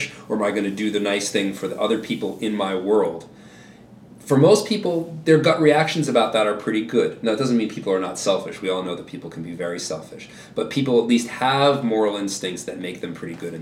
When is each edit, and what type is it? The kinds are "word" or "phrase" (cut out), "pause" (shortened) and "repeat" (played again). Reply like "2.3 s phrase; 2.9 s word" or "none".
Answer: none